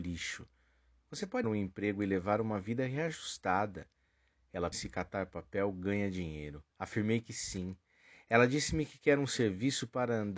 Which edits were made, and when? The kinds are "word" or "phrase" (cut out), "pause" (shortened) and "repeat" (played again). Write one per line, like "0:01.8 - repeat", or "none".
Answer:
0:01.4 - word
0:04.7 - word
0:06.7 - pause